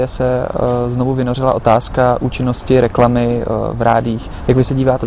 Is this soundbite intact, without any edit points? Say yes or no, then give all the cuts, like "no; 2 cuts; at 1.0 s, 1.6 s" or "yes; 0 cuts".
yes; 0 cuts